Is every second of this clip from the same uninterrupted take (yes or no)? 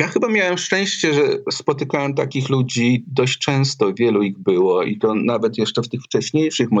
yes